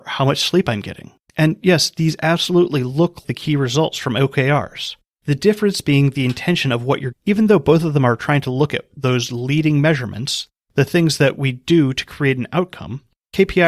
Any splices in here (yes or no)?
yes